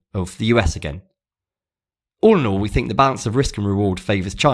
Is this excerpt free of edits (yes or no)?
yes